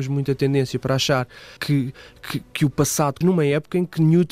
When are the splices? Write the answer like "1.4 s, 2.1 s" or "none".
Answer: 1.6 s, 3.2 s

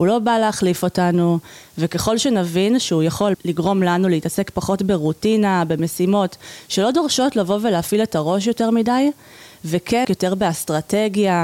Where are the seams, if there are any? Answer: 3.3 s, 10.0 s

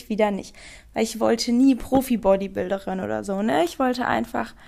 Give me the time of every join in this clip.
none

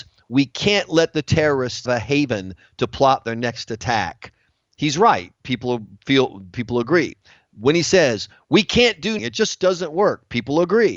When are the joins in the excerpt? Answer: 1.9 s, 9.2 s

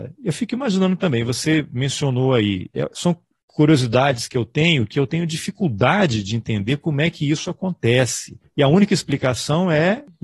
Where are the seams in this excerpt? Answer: none

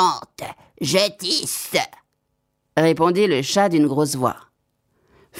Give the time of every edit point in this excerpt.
none

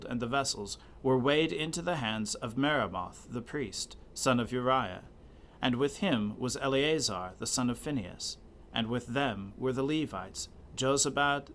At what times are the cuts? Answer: none

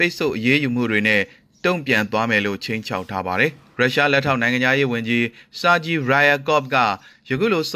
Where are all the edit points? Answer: none

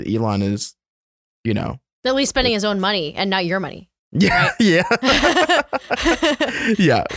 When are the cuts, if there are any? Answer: 4.0 s

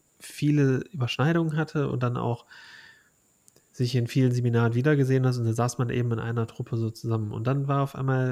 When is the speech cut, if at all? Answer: none

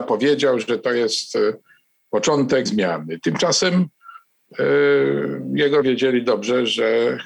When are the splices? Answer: 2.7 s, 5.8 s

